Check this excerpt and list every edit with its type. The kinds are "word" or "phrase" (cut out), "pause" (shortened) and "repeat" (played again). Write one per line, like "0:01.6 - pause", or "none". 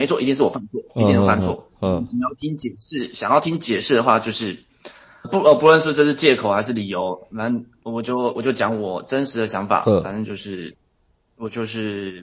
0:05.2 - word